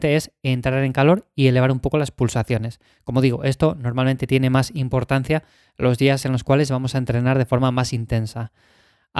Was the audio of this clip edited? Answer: no; 0 cuts

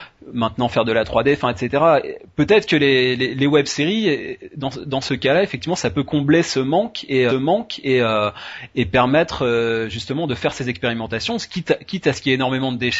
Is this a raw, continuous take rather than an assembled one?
no; 1 cut; at 7.3 s

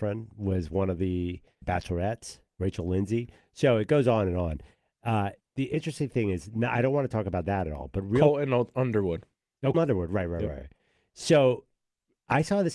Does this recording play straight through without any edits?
no; 3 cuts; at 1.6 s, 5.4 s, 9.7 s

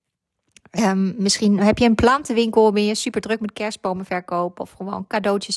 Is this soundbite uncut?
yes; 0 cuts

